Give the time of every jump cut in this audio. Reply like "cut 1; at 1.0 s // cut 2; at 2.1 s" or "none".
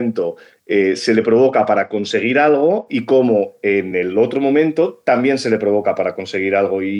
none